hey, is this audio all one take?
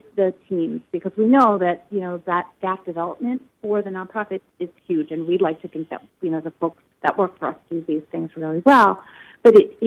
no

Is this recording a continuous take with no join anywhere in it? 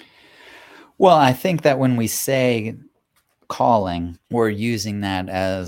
no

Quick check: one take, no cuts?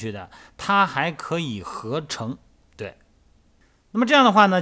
yes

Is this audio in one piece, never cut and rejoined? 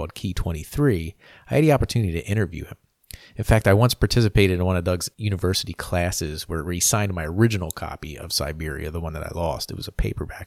yes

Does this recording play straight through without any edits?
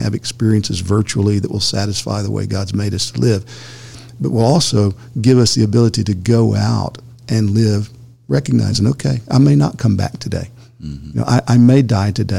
yes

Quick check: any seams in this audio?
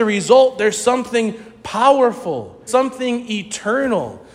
yes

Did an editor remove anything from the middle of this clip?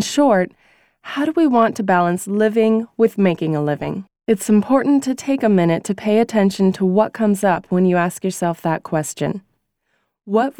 yes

